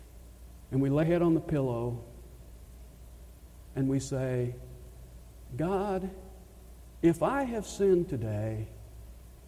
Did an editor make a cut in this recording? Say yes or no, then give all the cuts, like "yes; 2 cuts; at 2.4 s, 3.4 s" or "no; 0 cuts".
yes; 1 cut; at 1.0 s